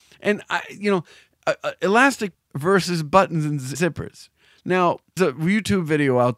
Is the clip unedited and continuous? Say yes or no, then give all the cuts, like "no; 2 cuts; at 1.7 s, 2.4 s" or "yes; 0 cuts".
no; 3 cuts; at 2.3 s, 3.7 s, 5.2 s